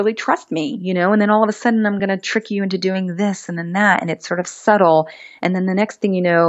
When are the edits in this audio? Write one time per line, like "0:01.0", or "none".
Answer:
none